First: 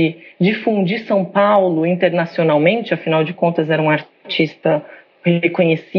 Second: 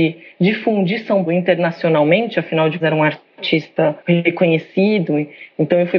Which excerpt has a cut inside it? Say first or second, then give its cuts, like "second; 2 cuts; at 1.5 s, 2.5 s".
second; 3 cuts; at 1.3 s, 2.8 s, 4.0 s